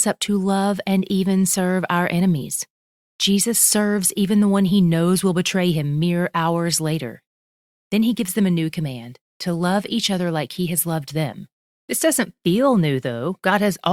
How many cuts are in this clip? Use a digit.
0